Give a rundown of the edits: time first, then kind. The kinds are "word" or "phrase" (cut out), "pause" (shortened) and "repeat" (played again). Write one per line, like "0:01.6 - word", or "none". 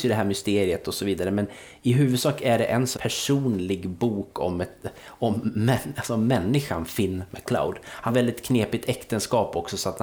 0:02.9 - phrase
0:08.1 - word